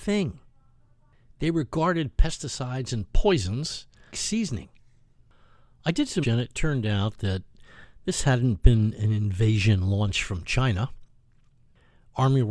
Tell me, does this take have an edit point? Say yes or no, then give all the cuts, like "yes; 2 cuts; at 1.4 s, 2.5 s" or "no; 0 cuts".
yes; 2 cuts; at 4.1 s, 6.2 s